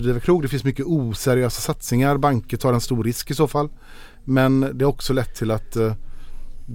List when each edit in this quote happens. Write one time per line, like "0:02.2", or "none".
none